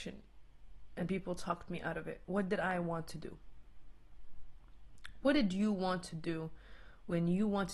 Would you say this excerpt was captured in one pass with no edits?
yes; 0 cuts

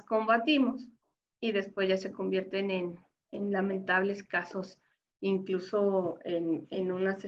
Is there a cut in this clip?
no; 0 cuts

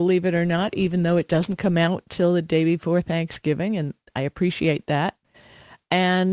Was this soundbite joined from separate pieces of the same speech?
no; 0 cuts

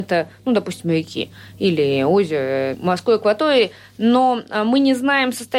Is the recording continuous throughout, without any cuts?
no; 1 cut; at 2.7 s

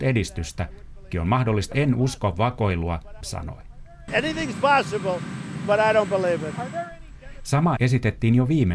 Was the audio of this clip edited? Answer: yes; 4 cuts; at 1.1 s, 1.7 s, 3.2 s, 7.8 s

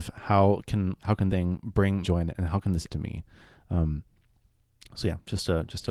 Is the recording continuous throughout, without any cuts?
no; 4 cuts; at 1.0 s, 1.3 s, 2.0 s, 2.9 s

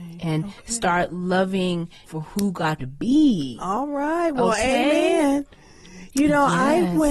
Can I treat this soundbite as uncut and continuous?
no; 2 cuts; at 2.1 s, 2.8 s

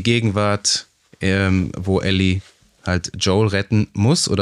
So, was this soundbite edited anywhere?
no; 0 cuts

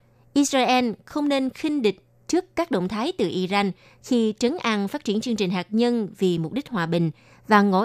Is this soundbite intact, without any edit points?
yes; 0 cuts

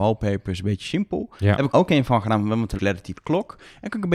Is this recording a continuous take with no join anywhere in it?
no; 3 cuts; at 1.7 s, 2.8 s, 3.1 s

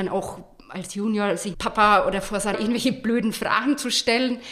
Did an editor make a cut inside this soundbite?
yes; 2 cuts; at 1.5 s, 2.5 s

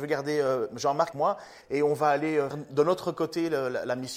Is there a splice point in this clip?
yes; 3 cuts; at 1.1 s, 1.6 s, 2.5 s

